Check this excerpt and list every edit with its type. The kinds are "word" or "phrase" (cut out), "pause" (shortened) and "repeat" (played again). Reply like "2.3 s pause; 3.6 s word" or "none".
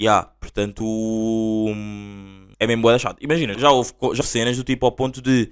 2.5 s pause; 3.5 s word; 4.2 s word